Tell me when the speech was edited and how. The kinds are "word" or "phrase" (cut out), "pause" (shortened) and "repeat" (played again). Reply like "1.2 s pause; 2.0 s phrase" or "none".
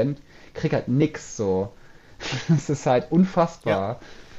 none

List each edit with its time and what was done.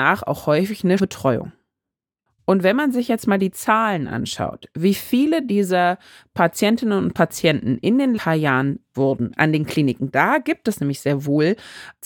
1.0 s word; 8.2 s word; 8.9 s word

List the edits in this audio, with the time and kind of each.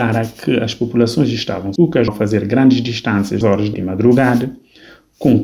1.8 s word; 2.1 s word; 3.4 s word; 3.7 s word

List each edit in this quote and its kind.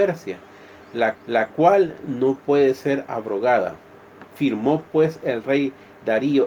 1.1 s repeat; 4.3 s pause

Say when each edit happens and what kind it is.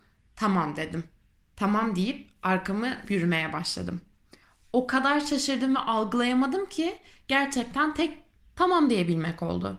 3.1 s word; 8.4 s word

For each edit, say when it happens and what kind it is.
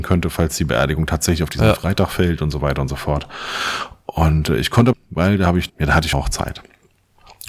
4.9 s word; 5.7 s word; 6.1 s word

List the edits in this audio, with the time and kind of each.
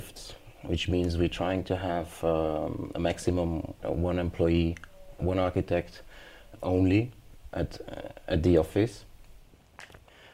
3.8 s word; 5.2 s word; 6.6 s word

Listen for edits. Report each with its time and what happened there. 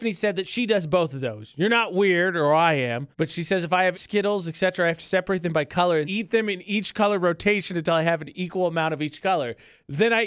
3.1 s pause; 3.9 s word; 6.0 s word

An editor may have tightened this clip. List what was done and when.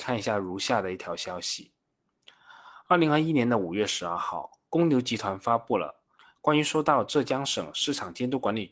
4.7 s pause

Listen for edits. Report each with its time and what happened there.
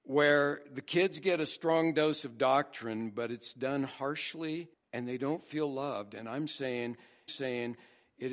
4.7 s pause; 7.3 s repeat

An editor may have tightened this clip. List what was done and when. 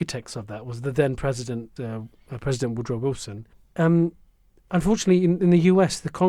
1.8 s phrase; 3.5 s pause

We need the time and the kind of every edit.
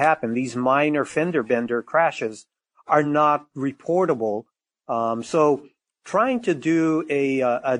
none

